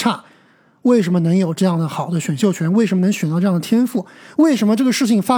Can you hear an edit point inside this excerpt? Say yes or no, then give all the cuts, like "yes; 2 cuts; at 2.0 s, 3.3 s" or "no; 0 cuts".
no; 0 cuts